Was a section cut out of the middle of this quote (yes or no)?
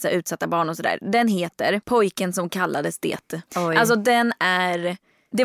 yes